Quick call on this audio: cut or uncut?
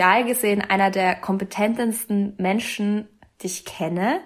uncut